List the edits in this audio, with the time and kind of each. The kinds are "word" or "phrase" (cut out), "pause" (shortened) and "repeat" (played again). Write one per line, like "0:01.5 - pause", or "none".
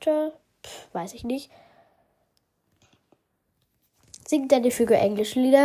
none

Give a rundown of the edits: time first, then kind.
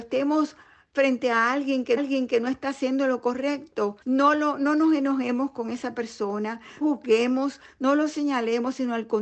0:02.0 - repeat
0:04.0 - pause
0:06.8 - phrase

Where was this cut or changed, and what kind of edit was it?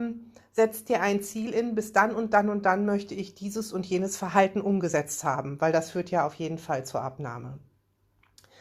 none

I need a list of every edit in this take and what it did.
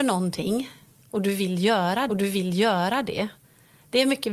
0:02.1 - repeat

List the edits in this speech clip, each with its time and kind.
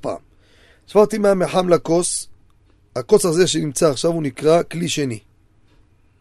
none

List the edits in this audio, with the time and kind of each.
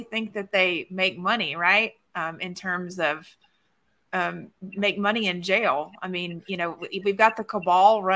0:04.5 - pause

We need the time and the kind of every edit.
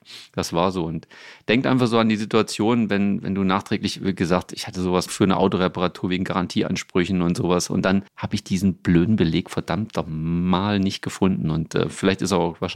0:05.1 - phrase
0:08.1 - pause

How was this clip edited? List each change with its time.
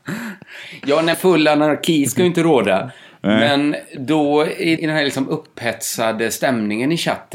0:01.1 - word
0:04.8 - word

